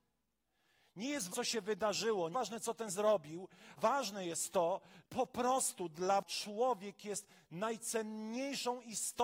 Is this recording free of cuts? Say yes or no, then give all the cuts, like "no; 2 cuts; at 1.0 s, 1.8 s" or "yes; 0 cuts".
no; 6 cuts; at 1.3 s, 2.3 s, 2.9 s, 3.8 s, 5.0 s, 6.2 s